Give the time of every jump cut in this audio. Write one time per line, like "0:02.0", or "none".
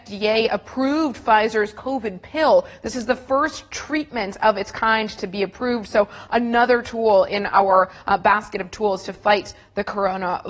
none